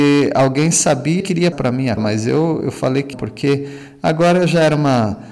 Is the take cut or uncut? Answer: cut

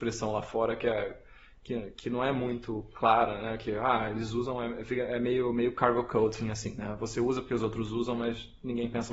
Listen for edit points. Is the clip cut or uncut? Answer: uncut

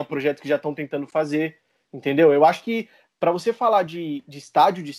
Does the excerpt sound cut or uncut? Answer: uncut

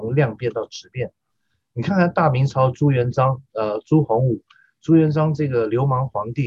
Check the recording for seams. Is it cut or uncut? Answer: uncut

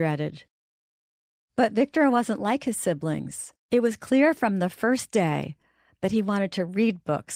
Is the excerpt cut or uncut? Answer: cut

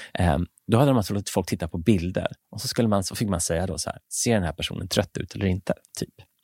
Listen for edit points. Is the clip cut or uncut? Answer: cut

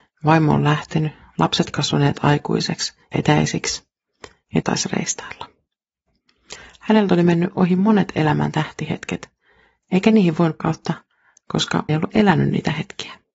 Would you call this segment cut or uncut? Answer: cut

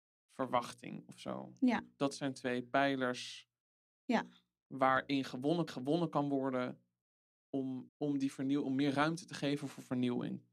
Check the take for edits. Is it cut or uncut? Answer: cut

